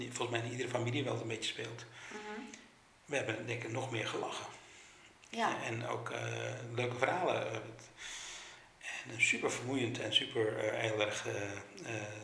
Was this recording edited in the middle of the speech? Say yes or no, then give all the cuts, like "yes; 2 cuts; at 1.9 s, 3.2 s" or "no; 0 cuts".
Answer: no; 0 cuts